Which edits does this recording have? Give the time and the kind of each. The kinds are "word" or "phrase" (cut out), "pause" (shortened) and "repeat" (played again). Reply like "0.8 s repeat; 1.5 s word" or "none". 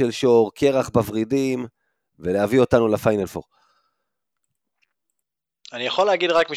none